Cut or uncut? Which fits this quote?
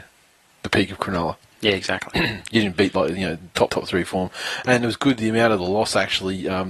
cut